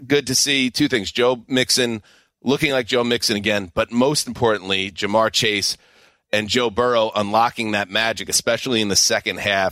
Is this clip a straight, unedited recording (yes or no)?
yes